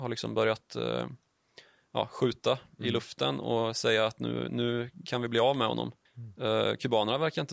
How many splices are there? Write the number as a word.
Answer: one